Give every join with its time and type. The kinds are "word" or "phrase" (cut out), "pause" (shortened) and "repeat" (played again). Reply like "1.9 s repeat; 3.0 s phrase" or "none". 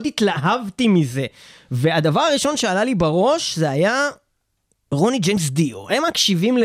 none